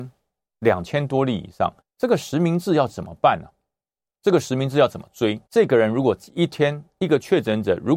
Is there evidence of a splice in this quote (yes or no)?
yes